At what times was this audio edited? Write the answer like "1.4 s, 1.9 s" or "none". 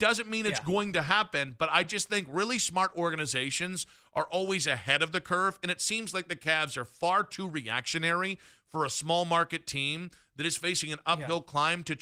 none